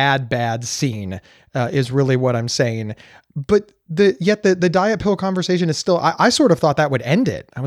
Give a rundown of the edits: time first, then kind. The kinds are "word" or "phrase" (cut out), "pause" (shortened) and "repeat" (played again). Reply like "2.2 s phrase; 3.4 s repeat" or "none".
none